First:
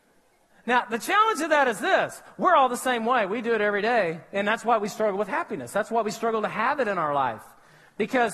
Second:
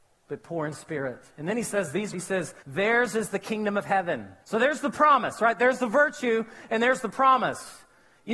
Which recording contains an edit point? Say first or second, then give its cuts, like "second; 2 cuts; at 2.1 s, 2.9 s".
second; 3 cuts; at 2.1 s, 2.6 s, 4.4 s